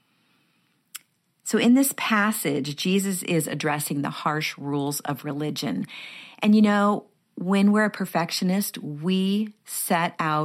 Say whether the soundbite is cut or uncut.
uncut